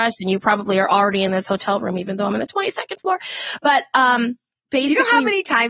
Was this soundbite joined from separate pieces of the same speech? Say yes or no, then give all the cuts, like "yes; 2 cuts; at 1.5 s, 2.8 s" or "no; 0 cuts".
no; 0 cuts